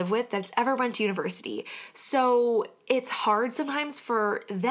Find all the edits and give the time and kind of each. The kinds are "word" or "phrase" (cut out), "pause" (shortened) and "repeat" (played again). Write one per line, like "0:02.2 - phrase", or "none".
none